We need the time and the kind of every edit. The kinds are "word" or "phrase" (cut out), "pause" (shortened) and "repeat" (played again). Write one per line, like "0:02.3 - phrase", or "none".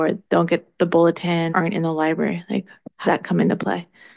0:01.5 - word
0:03.0 - word